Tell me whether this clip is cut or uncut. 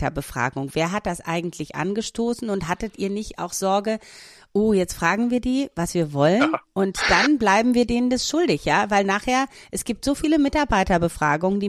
uncut